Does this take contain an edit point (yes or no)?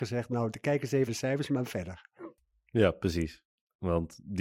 yes